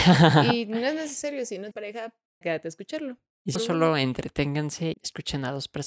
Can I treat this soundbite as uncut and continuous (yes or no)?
no